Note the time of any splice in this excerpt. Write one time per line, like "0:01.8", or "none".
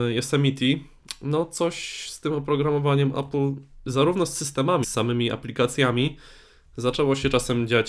0:04.8